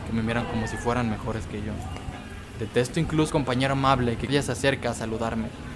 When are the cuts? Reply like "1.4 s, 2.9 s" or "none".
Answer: 3.3 s, 4.3 s